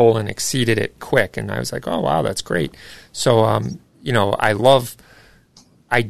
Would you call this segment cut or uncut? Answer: cut